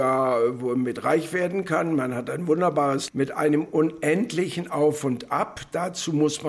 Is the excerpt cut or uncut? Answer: cut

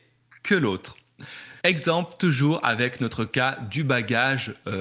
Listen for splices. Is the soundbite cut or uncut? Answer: cut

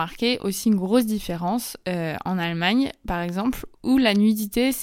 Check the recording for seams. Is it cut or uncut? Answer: uncut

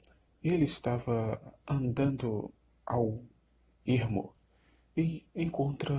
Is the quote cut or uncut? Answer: uncut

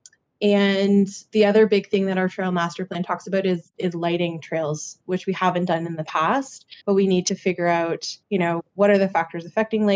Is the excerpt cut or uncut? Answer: cut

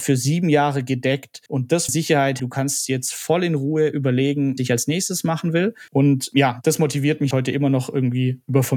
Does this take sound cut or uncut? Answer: cut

